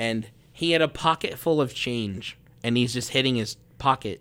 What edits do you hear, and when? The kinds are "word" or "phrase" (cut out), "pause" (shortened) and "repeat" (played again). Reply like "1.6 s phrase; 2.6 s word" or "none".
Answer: none